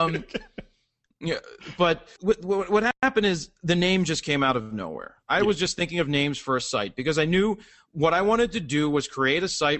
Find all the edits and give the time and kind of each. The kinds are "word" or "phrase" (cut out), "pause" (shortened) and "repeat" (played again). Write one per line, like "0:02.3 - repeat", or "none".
0:02.2 - word